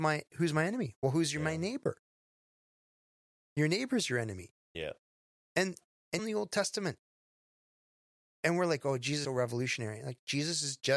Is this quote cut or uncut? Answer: cut